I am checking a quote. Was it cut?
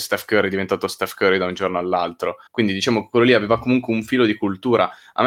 yes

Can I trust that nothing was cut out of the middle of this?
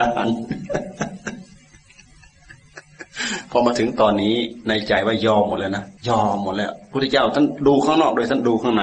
no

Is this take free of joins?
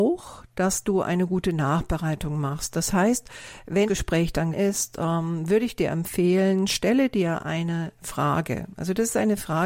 no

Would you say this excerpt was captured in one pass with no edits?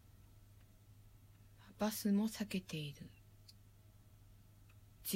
yes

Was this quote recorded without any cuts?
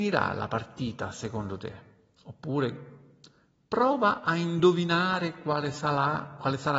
yes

